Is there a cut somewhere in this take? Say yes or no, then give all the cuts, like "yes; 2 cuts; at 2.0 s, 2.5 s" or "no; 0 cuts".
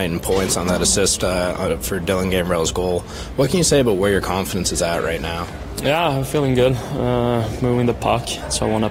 no; 0 cuts